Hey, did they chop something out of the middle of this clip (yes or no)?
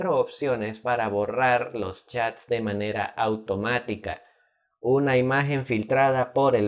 no